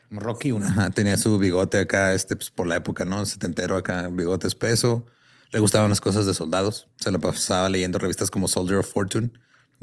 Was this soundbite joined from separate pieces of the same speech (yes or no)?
no